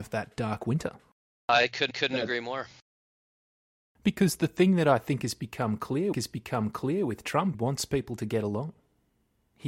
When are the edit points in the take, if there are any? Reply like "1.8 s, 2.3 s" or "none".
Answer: 1.9 s, 6.1 s, 7.5 s